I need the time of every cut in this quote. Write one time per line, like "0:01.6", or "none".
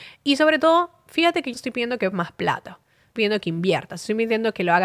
0:01.5
0:02.1
0:03.2